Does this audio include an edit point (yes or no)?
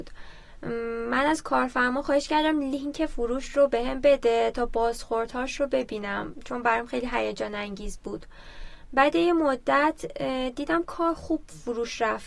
no